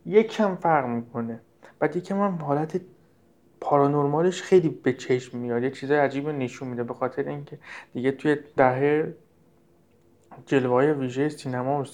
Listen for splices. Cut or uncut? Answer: cut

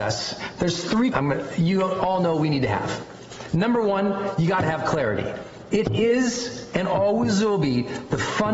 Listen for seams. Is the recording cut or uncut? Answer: cut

